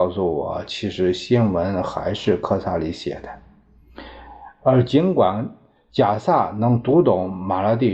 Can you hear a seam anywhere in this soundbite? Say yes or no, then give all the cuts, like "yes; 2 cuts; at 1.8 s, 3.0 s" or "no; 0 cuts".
no; 0 cuts